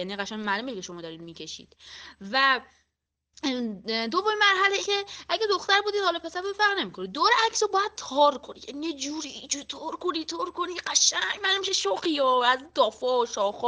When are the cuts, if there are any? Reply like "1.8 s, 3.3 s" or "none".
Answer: 4.8 s

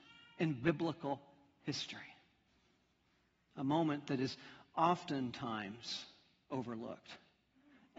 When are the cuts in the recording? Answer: none

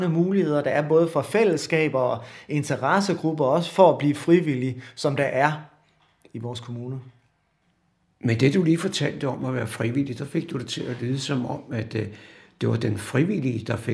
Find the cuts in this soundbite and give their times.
none

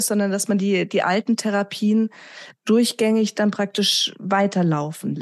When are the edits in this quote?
none

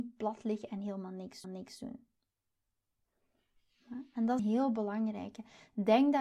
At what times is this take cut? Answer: 1.4 s, 4.4 s

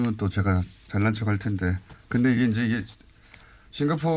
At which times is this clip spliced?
none

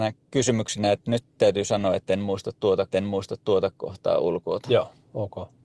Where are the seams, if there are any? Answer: 2.9 s

